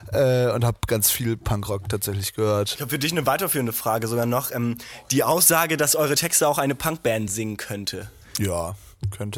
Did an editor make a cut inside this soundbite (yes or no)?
no